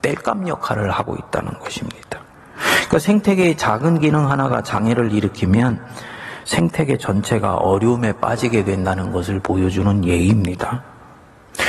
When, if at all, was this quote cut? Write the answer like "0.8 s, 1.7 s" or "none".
2.3 s